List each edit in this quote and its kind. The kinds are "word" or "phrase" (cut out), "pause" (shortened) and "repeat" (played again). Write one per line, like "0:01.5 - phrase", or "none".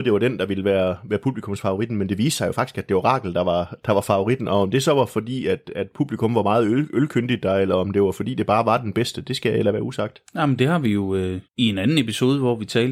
0:11.5 - pause